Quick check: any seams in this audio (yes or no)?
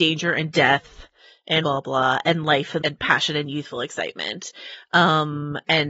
yes